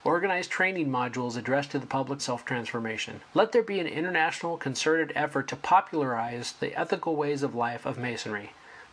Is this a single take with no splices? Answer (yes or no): no